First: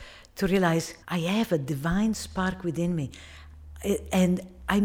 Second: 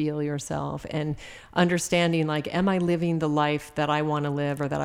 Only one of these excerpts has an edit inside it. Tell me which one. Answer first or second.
first